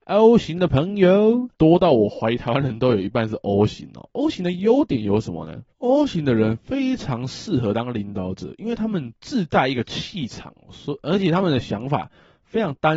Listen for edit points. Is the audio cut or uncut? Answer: cut